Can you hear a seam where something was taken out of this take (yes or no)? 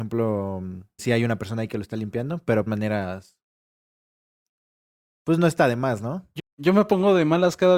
yes